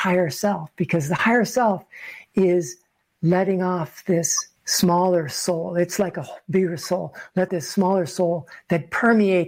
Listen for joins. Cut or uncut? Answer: cut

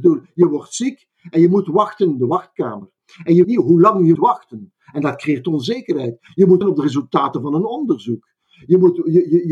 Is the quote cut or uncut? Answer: cut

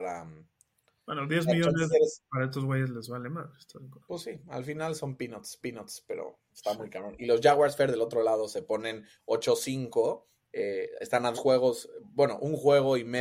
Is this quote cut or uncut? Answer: cut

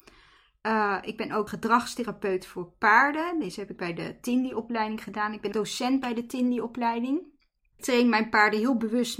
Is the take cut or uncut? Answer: cut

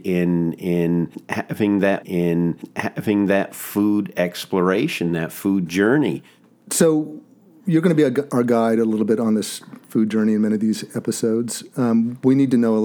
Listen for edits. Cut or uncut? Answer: cut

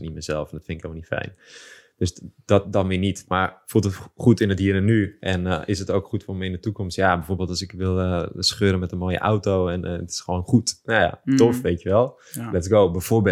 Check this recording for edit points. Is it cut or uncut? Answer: uncut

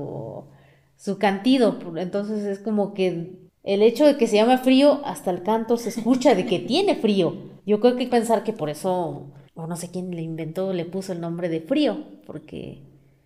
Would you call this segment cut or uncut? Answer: cut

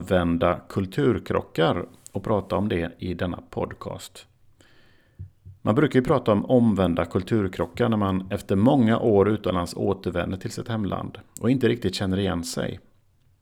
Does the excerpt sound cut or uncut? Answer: uncut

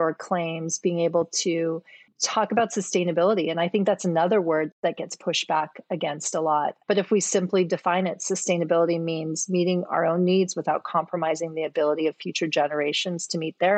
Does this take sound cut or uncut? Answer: uncut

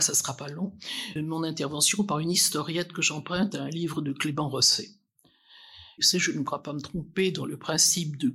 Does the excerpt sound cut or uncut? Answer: cut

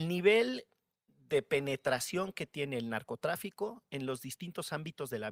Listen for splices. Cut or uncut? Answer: uncut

